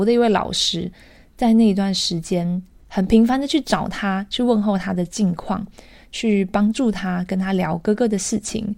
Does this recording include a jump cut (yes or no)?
no